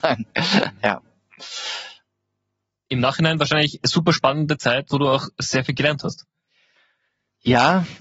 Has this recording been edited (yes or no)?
no